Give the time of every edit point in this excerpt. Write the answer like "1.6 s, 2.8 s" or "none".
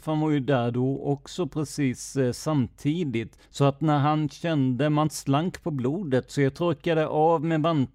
3.4 s